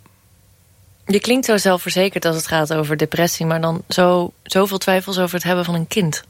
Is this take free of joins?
yes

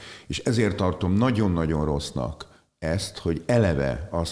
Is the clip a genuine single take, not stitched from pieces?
yes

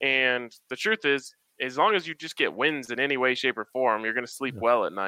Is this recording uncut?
yes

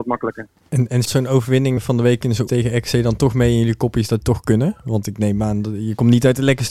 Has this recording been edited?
yes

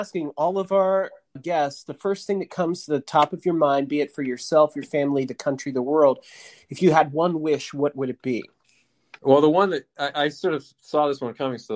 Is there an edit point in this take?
yes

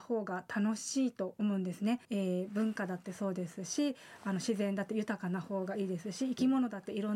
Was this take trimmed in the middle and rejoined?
yes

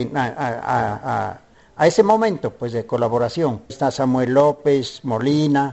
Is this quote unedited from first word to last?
no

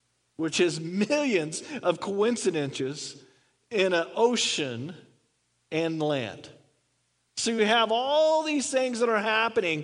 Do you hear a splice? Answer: no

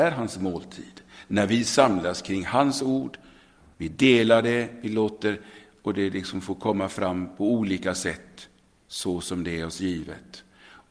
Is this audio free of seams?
yes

